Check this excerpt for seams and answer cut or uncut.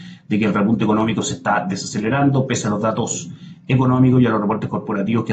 uncut